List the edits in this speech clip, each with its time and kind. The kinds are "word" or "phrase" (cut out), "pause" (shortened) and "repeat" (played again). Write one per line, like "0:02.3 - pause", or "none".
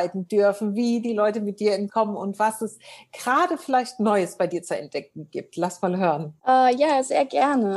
0:01.9 - word
0:06.4 - pause